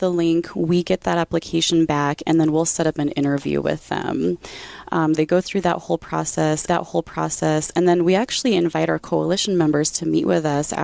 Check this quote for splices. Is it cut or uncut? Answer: cut